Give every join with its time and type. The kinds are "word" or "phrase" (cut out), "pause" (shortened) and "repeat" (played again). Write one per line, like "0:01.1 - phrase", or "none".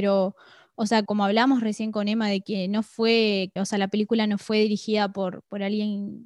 0:01.1 - word
0:03.6 - word